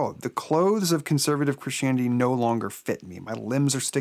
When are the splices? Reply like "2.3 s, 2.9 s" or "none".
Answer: none